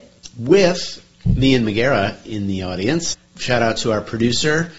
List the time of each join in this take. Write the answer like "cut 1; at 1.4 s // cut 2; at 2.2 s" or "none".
cut 1; at 1.1 s // cut 2; at 3.3 s